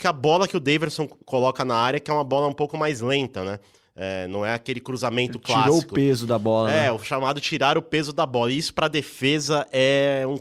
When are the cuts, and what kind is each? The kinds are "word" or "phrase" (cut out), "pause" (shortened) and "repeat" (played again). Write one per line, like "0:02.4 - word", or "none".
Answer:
none